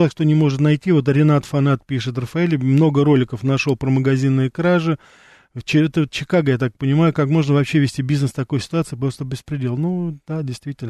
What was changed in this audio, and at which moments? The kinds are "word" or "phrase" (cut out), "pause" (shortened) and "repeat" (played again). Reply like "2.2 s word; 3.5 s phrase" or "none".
none